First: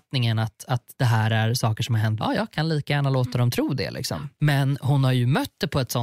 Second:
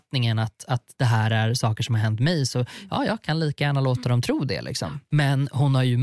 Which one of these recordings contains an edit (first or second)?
first